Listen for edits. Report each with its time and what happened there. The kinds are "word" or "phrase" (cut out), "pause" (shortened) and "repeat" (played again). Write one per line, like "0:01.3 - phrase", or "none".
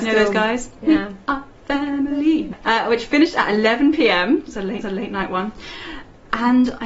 0:04.8 - repeat